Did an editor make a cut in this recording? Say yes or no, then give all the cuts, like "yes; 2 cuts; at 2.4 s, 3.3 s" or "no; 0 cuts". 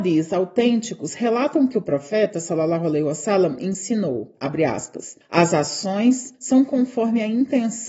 no; 0 cuts